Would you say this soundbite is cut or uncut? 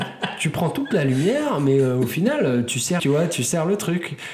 cut